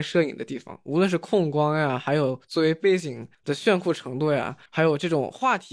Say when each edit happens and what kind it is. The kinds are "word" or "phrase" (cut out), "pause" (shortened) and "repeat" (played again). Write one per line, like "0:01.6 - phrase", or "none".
0:03.3 - pause
0:04.7 - pause